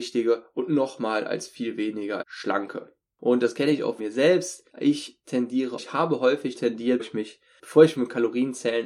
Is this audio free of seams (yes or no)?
no